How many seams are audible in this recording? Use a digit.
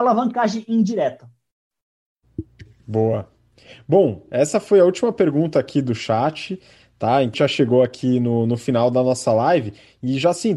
1